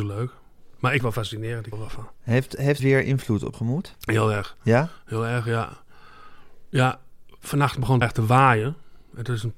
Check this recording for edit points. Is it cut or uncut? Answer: cut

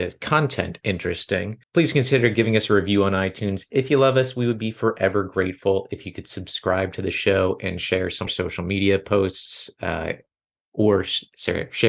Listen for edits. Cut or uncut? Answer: cut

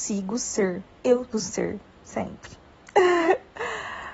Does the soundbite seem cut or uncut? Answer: cut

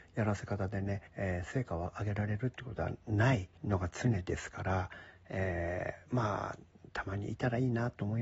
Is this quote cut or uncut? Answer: cut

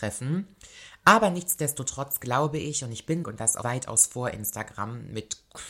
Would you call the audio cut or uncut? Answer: cut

